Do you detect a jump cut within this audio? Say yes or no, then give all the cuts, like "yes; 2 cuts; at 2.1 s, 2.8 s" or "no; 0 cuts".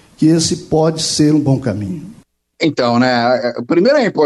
no; 0 cuts